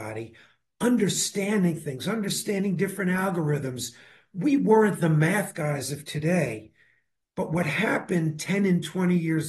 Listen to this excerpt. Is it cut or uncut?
uncut